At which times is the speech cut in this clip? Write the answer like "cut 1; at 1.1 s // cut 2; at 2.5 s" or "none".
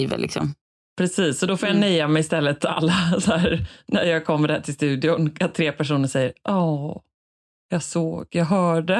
none